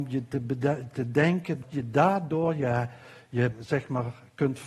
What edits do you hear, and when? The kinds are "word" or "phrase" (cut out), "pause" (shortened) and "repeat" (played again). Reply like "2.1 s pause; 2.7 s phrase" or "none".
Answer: 1.6 s word; 3.5 s word